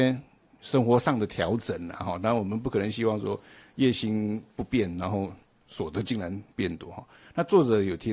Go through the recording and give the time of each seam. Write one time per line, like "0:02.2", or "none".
0:06.5